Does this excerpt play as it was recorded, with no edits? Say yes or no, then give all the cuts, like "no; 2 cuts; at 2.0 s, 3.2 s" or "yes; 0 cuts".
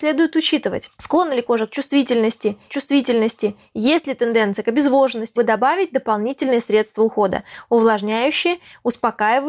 no; 2 cuts; at 2.7 s, 5.4 s